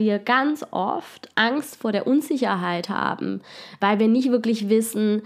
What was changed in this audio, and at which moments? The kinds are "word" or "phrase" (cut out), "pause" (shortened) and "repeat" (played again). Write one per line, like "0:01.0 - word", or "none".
0:01.3 - word
0:03.8 - word